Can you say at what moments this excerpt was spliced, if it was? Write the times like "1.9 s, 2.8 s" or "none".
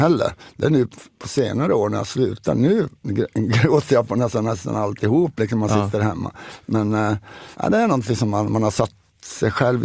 7.5 s